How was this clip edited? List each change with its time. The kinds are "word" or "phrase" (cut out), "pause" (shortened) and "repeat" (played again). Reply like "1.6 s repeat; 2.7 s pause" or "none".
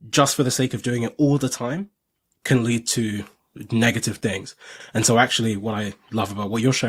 none